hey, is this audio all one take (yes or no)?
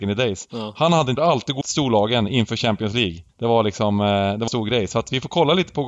no